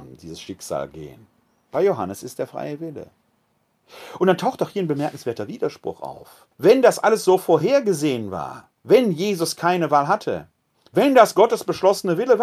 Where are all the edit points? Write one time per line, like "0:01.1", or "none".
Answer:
0:06.5
0:08.8